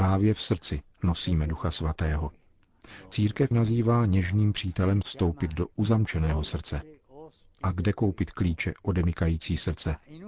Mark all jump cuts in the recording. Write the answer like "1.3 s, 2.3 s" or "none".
3.5 s, 5.0 s